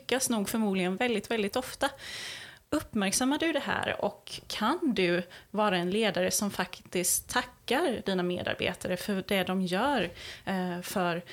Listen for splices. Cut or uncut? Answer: uncut